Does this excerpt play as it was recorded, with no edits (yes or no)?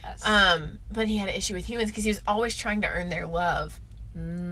yes